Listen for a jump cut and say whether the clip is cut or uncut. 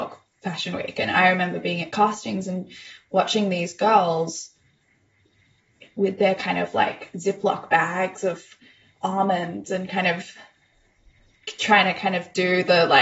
uncut